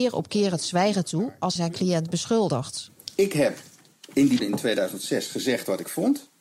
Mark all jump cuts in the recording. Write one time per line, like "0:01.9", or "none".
0:01.6
0:04.4

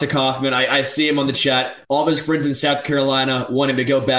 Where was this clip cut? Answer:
0:01.8

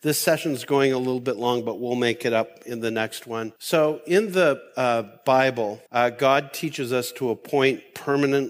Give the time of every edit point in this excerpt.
0:03.6
0:05.9

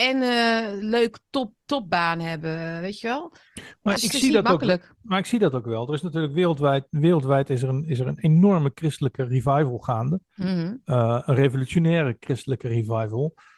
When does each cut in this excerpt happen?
0:04.0

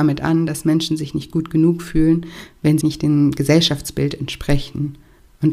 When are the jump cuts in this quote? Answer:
0:02.8

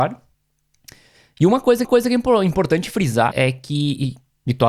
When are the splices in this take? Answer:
0:01.8
0:03.3

